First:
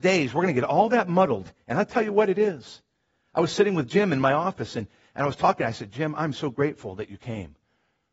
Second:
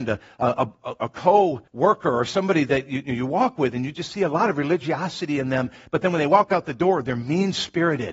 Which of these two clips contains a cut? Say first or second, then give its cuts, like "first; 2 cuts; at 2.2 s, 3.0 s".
second; 1 cut; at 1.7 s